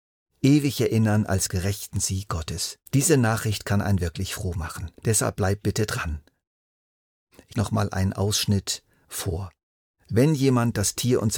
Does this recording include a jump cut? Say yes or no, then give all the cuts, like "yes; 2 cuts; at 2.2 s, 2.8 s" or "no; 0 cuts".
yes; 4 cuts; at 1.5 s, 2.9 s, 5.0 s, 7.5 s